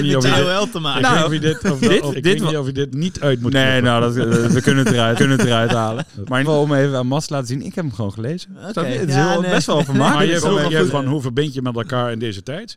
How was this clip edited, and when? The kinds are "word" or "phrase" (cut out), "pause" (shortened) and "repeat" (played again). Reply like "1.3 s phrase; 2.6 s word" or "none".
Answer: 1.2 s phrase; 2.1 s word; 2.9 s word; 5.2 s repeat; 6.4 s word; 10.9 s word